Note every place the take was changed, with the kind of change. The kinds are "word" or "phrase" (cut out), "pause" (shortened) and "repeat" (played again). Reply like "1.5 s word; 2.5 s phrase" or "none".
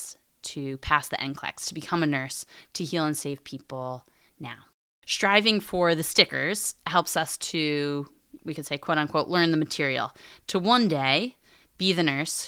none